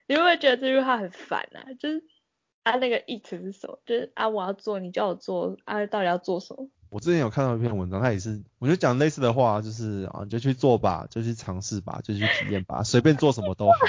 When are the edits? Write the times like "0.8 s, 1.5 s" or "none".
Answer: none